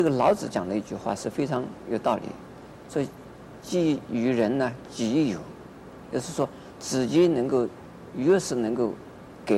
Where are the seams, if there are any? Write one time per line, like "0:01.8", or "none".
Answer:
none